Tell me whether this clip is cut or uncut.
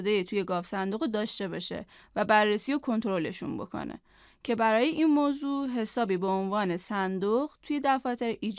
uncut